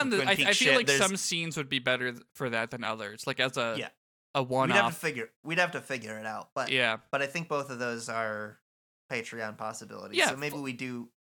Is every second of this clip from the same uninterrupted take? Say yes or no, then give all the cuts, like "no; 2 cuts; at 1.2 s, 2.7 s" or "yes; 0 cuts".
no; 1 cut; at 7.1 s